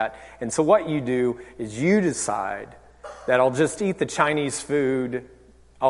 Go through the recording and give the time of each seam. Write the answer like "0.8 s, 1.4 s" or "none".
none